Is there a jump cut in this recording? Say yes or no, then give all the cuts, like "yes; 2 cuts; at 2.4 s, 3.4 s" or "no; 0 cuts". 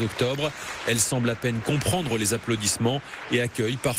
no; 0 cuts